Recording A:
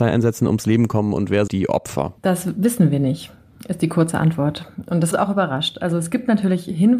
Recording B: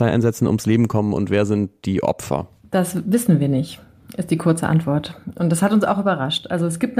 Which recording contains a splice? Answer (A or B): A